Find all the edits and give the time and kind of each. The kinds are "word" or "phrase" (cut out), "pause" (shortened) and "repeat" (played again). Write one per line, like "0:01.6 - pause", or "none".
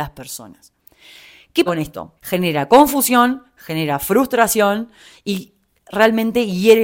0:01.7 - word
0:02.2 - pause